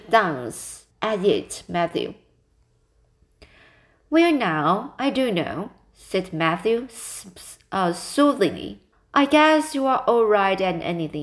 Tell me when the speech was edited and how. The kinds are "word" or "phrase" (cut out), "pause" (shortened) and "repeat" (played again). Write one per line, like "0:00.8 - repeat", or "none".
0:00.9 - pause
0:08.9 - pause